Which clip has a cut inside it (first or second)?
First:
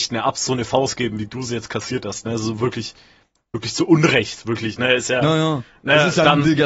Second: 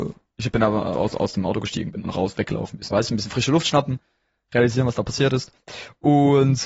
second